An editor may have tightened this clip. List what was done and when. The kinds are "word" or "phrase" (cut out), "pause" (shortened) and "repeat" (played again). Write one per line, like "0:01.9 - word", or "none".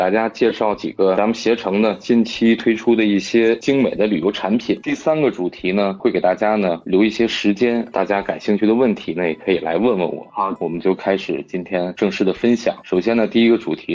0:07.9 - phrase
0:10.6 - phrase